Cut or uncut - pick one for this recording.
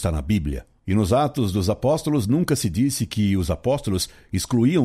uncut